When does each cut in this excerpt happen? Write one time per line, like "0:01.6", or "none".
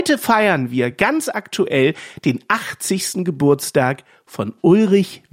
none